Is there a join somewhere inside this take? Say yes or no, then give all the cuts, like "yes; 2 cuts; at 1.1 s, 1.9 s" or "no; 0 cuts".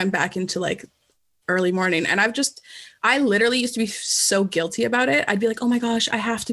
no; 0 cuts